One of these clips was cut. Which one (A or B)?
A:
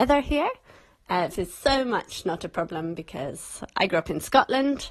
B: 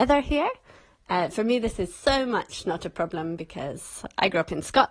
A